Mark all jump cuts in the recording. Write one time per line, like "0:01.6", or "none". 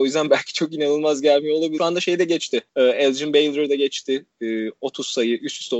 0:01.8